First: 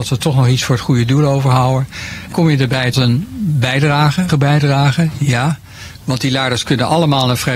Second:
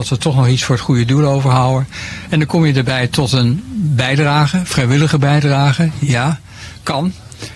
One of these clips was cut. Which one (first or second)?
first